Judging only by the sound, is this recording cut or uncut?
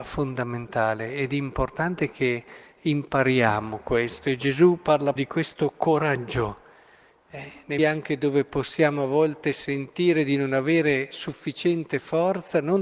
cut